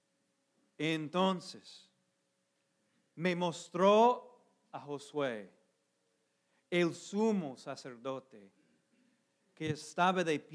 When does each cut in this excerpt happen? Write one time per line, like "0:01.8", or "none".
none